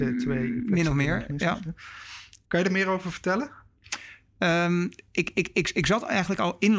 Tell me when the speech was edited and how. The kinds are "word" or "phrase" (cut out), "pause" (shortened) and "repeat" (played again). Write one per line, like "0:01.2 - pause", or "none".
0:02.4 - pause